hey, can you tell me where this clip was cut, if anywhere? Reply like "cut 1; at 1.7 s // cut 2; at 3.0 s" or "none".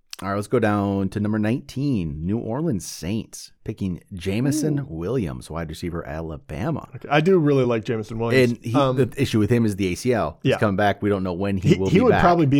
none